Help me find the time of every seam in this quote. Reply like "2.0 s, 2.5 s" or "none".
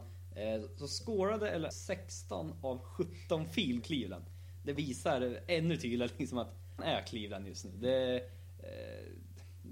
1.7 s, 3.8 s, 4.8 s, 6.8 s